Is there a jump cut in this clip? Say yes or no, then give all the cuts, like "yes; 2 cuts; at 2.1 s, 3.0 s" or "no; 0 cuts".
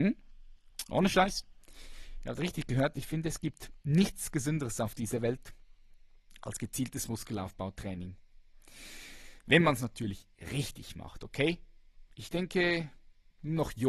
yes; 1 cut; at 12.1 s